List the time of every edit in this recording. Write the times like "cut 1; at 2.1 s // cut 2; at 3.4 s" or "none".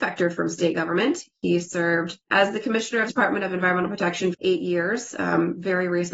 cut 1; at 3.1 s // cut 2; at 4.3 s